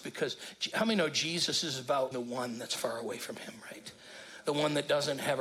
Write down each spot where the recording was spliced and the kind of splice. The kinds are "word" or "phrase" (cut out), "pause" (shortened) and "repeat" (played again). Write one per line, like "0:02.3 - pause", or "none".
0:02.1 - word